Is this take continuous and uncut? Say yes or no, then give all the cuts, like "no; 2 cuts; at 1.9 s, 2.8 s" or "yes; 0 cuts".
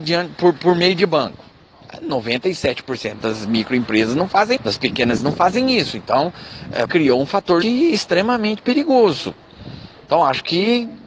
no; 4 cuts; at 4.6 s, 5.2 s, 6.9 s, 7.6 s